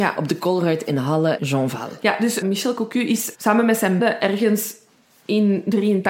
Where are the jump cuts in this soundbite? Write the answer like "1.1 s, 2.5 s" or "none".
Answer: 1.4 s, 2.4 s, 3.3 s, 4.0 s